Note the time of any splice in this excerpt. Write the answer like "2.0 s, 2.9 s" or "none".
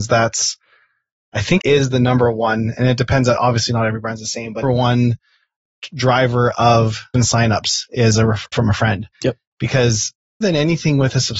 1.6 s, 4.6 s, 7.1 s, 8.5 s, 9.1 s, 10.4 s